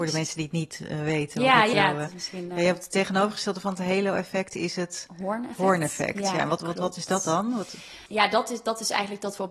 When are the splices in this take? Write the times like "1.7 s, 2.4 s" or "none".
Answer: 1.7 s, 8.1 s